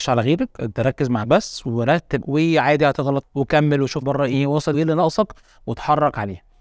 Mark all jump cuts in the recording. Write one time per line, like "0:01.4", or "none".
0:01.2
0:02.2
0:03.2
0:04.0
0:04.3
0:04.7